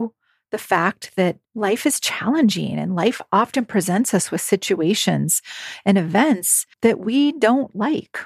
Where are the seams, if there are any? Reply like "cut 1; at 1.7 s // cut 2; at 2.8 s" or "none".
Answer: cut 1; at 1.4 s // cut 2; at 6.7 s